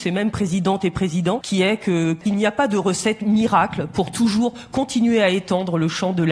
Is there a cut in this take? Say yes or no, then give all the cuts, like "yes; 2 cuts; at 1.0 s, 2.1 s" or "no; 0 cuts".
no; 0 cuts